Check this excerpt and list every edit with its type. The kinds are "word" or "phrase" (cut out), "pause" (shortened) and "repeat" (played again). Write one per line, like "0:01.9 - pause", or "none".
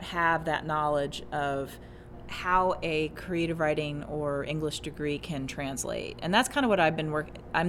none